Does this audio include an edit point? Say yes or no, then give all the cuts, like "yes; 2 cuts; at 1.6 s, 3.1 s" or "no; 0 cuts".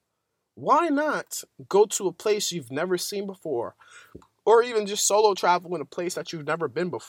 no; 0 cuts